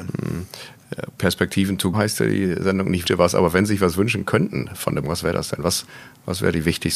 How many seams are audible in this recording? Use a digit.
3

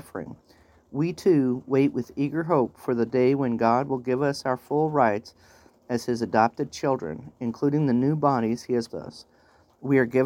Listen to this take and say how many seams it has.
1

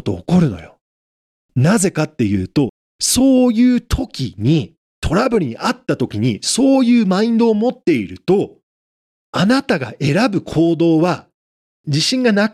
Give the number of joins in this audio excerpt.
0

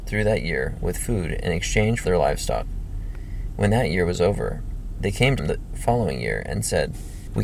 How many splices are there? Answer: 2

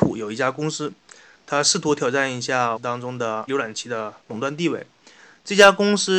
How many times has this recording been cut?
2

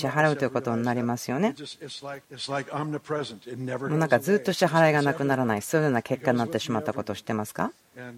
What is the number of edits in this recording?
1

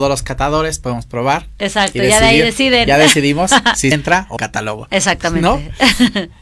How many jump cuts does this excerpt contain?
2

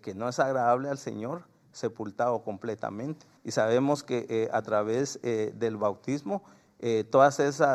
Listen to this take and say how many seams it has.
1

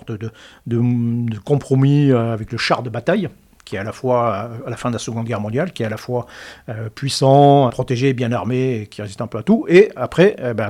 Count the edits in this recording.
1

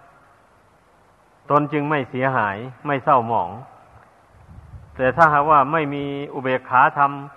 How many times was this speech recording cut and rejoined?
1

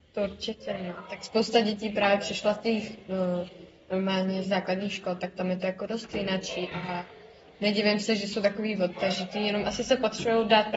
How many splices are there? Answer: 1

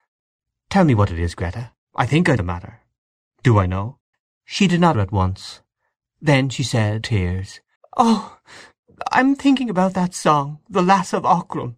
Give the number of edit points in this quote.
6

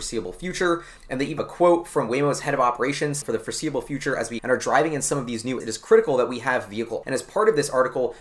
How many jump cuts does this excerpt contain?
5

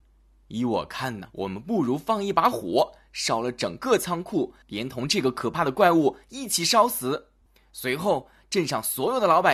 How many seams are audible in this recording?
3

